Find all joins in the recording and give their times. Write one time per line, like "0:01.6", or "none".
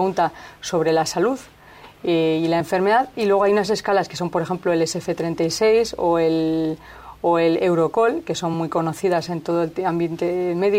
none